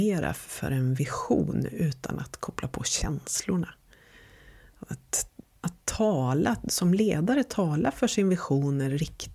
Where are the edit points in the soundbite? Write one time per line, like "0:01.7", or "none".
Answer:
0:05.6